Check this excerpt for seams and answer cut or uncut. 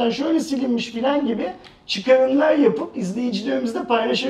uncut